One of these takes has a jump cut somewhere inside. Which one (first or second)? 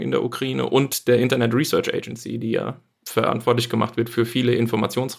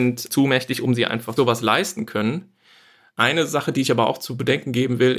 second